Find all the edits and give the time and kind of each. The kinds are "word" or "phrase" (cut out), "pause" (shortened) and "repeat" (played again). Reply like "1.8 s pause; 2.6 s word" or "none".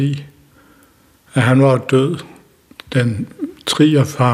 none